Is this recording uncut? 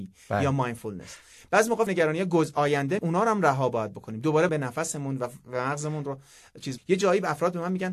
no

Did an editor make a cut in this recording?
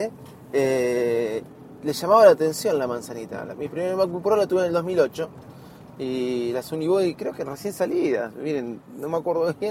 no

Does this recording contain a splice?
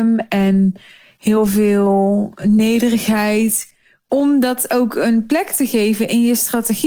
no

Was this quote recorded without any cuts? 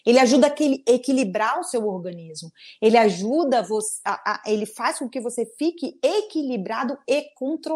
yes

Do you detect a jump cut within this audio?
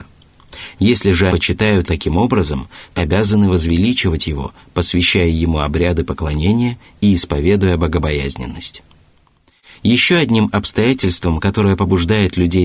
yes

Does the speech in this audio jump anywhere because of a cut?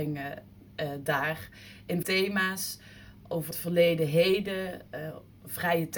yes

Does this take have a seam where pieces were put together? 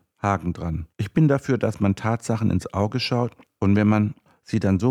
yes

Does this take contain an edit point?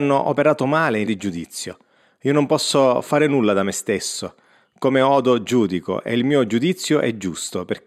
yes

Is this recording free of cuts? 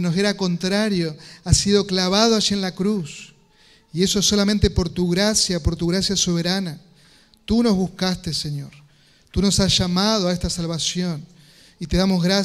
yes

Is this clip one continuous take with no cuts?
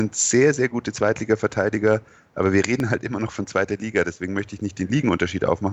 yes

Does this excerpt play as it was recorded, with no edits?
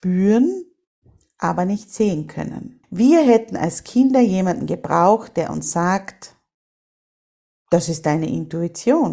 no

